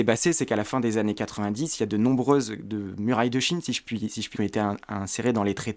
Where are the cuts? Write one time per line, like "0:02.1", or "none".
0:04.3